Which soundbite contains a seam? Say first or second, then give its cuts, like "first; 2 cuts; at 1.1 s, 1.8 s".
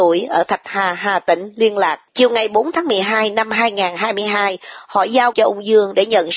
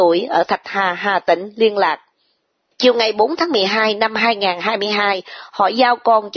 first; 2 cuts; at 2.1 s, 5.3 s